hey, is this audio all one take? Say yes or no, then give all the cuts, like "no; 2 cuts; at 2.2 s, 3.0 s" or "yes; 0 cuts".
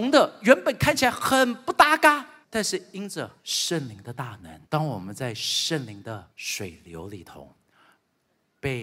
no; 4 cuts; at 2.4 s, 3.4 s, 4.6 s, 6.3 s